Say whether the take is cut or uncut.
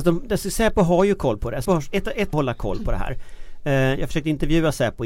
cut